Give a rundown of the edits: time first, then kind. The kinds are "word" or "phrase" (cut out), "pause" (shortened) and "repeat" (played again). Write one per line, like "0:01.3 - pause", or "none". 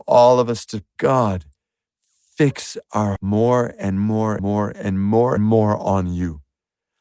0:01.0 - word
0:03.2 - word
0:04.4 - word
0:05.4 - word